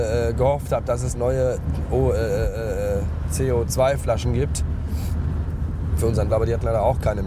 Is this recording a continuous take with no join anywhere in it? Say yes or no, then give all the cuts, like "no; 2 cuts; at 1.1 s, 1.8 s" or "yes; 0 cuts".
no; 3 cuts; at 1.1 s, 6.0 s, 6.3 s